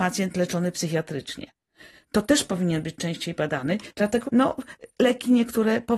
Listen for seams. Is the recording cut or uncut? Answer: cut